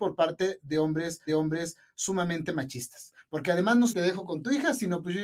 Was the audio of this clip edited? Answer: yes; 2 cuts; at 1.3 s, 3.9 s

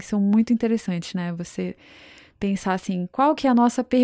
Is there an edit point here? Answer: no; 0 cuts

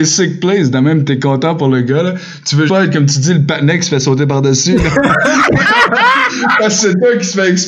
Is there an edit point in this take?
yes; 1 cut; at 2.7 s

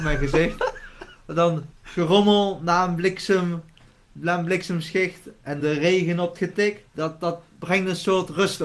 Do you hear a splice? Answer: yes; 4 cuts; at 1.7 s, 5.6 s, 6.4 s, 6.9 s

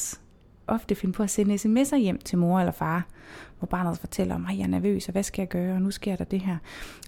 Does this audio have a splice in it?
no; 0 cuts

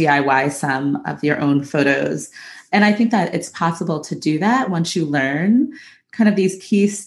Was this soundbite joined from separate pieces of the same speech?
no; 0 cuts

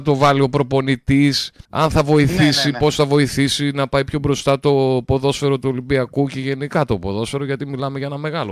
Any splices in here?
yes; 1 cut; at 1.6 s

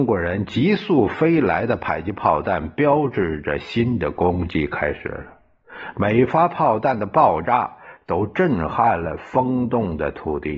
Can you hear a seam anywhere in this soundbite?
no; 0 cuts

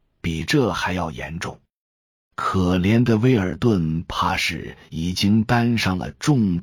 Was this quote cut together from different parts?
no; 0 cuts

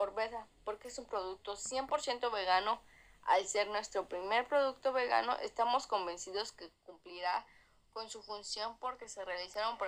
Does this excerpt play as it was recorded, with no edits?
yes; 0 cuts

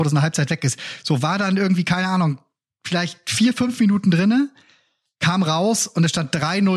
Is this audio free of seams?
yes; 0 cuts

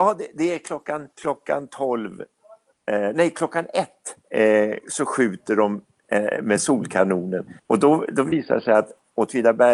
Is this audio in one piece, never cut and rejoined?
no; 4 cuts; at 1.1 s, 2.7 s, 4.2 s, 7.6 s

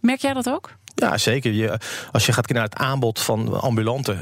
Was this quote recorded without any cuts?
no; 1 cut; at 2.5 s

